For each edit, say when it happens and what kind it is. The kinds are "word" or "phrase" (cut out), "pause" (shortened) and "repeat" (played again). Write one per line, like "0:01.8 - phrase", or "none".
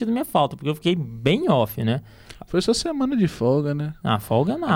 none